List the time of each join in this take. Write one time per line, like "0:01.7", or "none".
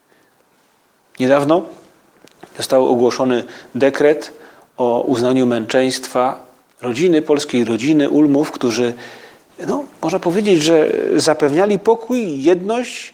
none